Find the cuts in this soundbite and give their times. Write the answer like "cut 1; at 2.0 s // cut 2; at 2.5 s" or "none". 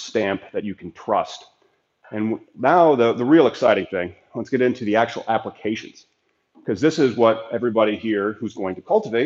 none